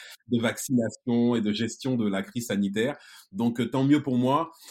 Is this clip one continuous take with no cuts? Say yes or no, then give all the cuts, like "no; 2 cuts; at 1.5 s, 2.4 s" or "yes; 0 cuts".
yes; 0 cuts